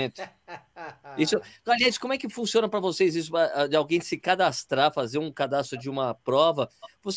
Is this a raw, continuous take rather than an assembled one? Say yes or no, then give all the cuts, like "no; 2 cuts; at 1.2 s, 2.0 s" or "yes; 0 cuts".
yes; 0 cuts